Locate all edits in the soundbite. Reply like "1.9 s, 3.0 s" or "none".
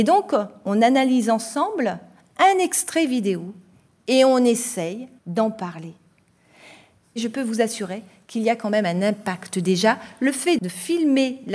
5.2 s, 10.6 s